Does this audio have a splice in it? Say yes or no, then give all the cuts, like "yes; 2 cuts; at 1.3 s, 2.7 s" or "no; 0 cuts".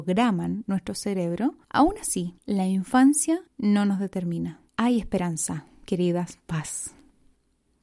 yes; 4 cuts; at 1.6 s, 2.4 s, 3.5 s, 4.7 s